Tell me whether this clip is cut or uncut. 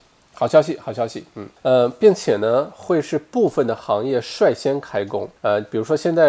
cut